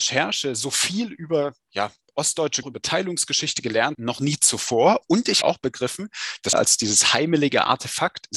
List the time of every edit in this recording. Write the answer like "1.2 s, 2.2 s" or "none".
2.6 s, 3.9 s, 5.4 s, 6.5 s